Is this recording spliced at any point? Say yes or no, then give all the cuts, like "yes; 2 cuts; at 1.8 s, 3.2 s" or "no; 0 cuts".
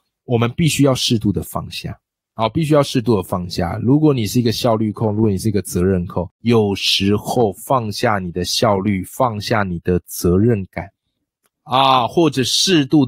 yes; 1 cut; at 6.3 s